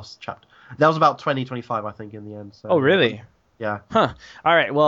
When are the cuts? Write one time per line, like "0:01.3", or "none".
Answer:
none